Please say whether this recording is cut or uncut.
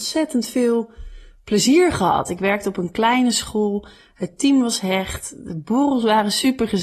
uncut